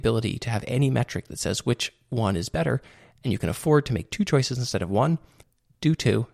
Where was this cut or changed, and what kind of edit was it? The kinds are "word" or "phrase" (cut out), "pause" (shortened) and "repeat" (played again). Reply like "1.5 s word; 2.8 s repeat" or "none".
none